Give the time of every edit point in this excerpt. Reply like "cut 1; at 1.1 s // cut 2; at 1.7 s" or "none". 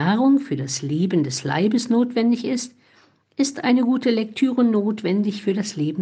none